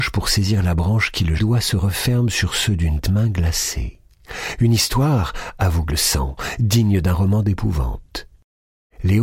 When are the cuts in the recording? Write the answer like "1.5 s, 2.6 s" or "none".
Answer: 1.4 s, 3.0 s, 5.9 s